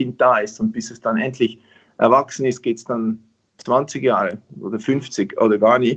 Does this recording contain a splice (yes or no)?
no